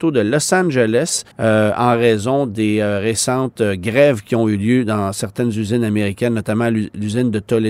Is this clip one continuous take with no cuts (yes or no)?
no